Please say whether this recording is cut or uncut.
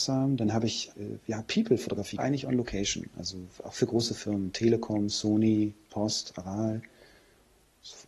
cut